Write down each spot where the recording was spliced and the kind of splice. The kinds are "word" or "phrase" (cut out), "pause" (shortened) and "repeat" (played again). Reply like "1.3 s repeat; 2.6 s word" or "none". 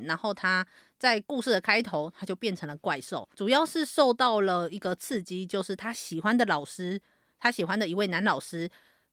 3.3 s pause